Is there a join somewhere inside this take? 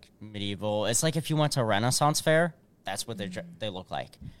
no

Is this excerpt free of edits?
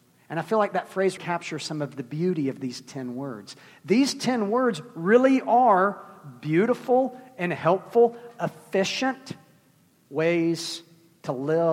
no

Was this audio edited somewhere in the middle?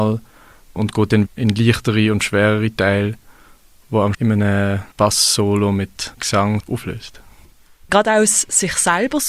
yes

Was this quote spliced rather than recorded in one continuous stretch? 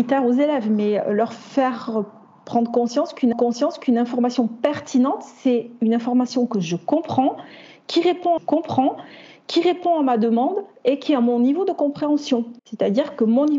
yes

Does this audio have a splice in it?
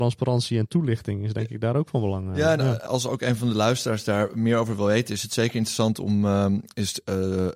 yes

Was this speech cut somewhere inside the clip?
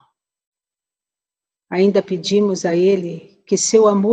no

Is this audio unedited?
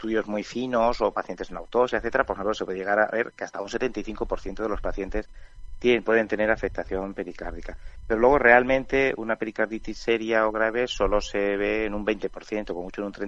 yes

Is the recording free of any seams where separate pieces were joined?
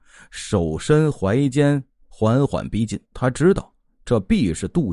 no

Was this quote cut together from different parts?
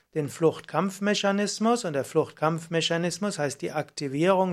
no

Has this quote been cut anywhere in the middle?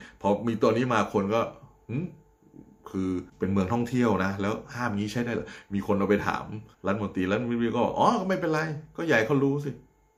yes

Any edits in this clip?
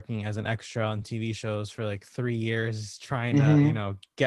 no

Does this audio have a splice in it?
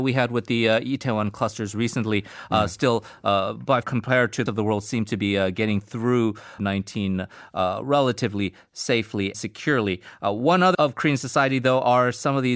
yes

